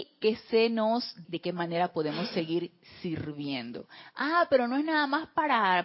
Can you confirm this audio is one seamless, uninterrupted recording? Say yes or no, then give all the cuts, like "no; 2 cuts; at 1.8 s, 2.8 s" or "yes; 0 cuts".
no; 1 cut; at 1.2 s